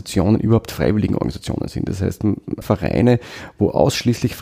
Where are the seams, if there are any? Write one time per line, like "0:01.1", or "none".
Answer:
0:02.6